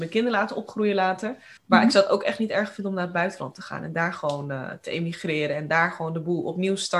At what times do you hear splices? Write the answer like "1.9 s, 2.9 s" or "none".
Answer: 1.6 s